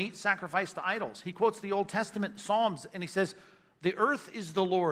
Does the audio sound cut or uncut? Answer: uncut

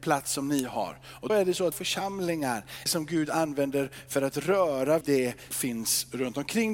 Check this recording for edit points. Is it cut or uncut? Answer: cut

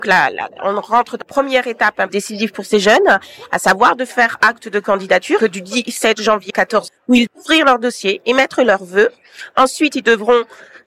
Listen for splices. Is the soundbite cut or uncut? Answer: cut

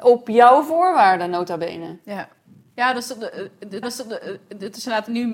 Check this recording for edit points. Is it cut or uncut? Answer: cut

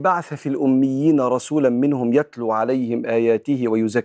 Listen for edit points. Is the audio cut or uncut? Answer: uncut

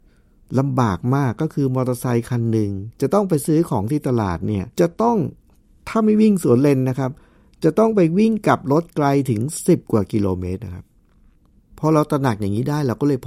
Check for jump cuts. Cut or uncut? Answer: cut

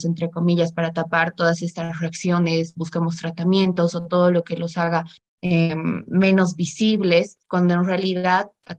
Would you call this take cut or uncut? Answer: uncut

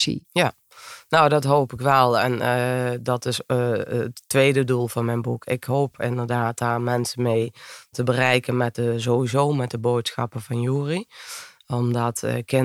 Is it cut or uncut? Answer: uncut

